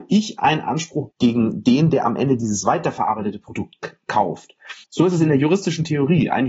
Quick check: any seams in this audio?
yes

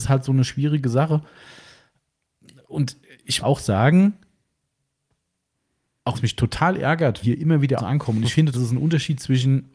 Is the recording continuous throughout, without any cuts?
no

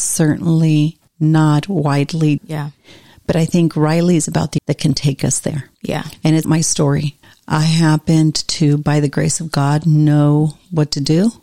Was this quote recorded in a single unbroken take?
no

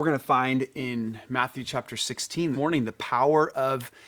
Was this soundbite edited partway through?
yes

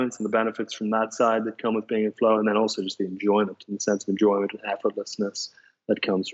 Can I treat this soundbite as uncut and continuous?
yes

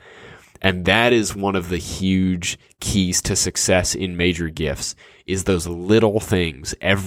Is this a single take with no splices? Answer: yes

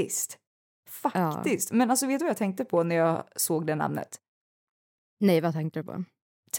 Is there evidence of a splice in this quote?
no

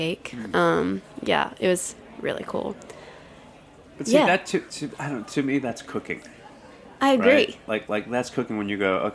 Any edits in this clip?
no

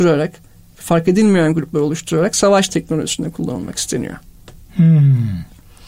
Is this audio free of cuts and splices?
yes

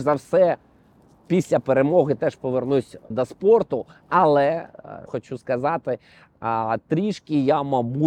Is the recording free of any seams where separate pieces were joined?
no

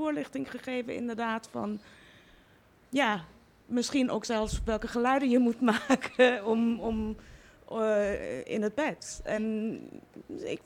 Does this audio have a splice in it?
no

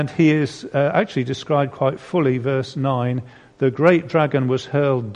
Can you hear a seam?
no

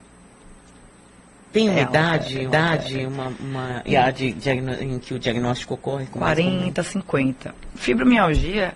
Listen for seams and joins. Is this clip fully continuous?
no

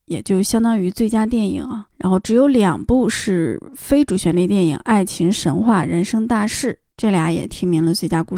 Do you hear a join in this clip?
yes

